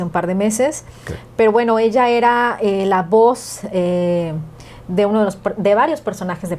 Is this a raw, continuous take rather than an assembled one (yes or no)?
yes